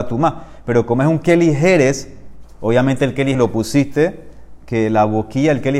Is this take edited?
yes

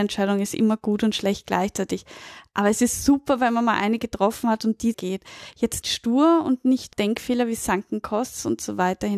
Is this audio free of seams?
no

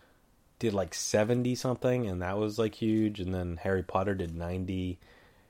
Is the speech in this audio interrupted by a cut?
no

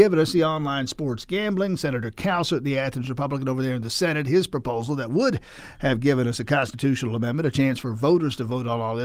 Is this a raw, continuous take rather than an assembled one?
yes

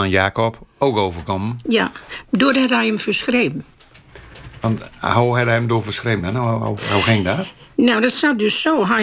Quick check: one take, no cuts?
yes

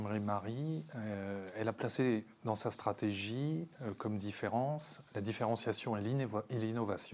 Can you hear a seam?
no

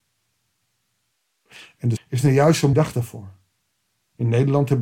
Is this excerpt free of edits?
no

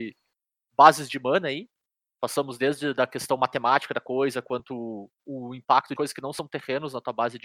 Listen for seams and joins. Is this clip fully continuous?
no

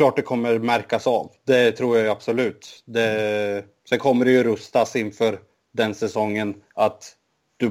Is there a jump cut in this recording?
no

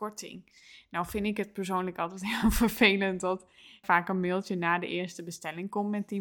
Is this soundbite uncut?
no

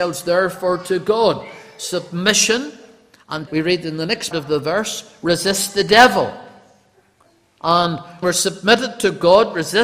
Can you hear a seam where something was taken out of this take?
yes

